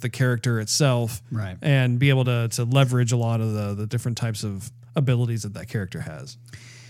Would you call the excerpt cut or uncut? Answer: uncut